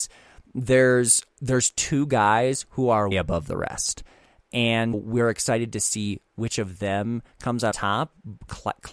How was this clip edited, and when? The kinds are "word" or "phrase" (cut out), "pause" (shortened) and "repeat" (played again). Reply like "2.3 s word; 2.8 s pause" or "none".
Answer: 3.1 s word; 4.9 s word; 7.7 s word